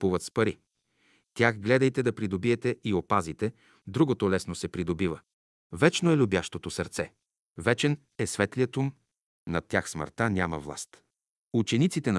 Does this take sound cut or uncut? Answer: uncut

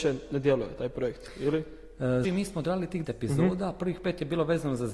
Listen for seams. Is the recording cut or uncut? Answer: cut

